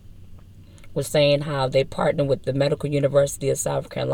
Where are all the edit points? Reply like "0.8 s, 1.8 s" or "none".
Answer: none